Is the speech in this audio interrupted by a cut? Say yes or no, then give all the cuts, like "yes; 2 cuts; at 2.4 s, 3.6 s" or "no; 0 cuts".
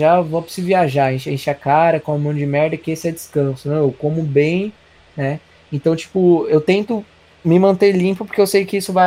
no; 0 cuts